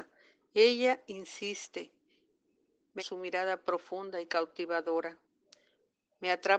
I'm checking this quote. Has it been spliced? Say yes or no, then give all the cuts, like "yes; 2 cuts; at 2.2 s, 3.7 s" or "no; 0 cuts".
yes; 1 cut; at 3.0 s